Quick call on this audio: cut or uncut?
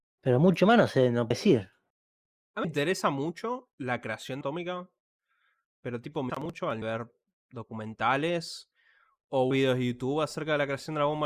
cut